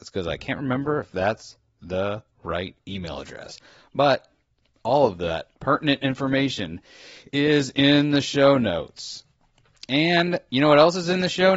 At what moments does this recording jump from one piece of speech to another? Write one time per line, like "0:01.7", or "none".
none

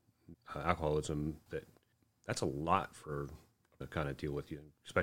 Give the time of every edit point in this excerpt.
0:01.5
0:01.9
0:03.8

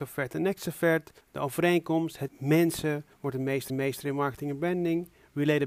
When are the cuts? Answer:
0:01.2
0:02.3
0:03.1
0:03.7

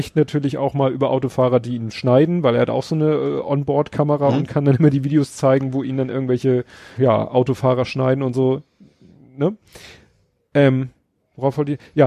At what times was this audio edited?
0:07.0

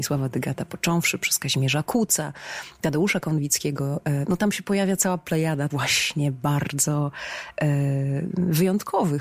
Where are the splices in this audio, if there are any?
0:05.7

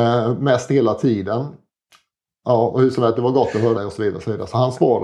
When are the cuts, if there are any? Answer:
0:03.7

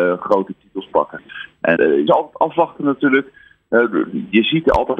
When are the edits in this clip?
0:01.8
0:02.1

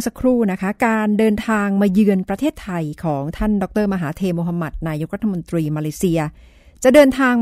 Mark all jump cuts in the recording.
none

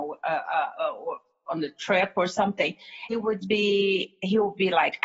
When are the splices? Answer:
0:01.4
0:03.1
0:03.4

